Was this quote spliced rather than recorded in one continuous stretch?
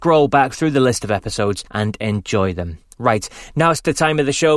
yes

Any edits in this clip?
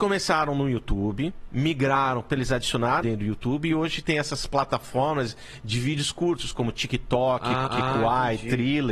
yes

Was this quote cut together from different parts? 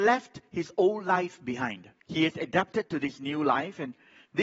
yes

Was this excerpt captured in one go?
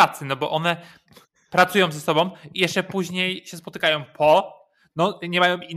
yes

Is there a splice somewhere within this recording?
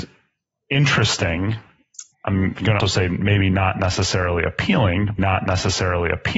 yes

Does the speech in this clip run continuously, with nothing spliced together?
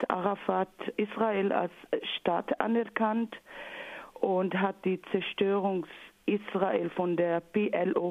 no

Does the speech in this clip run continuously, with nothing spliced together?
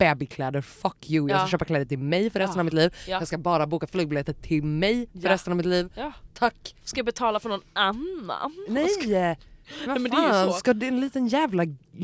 yes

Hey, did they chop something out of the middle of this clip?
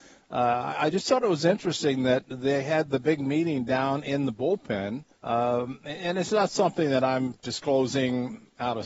yes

